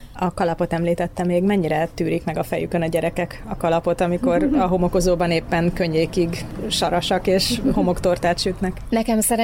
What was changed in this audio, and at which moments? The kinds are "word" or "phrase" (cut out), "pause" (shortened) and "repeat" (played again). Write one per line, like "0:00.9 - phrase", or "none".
none